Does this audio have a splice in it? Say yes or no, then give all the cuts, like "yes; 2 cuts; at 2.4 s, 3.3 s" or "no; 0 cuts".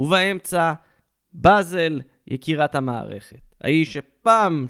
no; 0 cuts